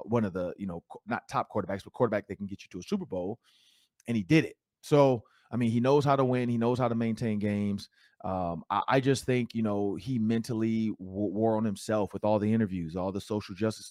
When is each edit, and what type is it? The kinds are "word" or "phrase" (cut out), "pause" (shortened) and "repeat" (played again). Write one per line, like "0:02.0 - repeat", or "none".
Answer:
none